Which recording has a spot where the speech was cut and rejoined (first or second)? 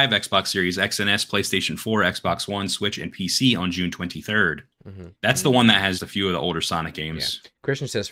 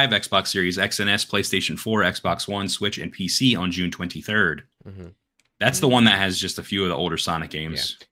first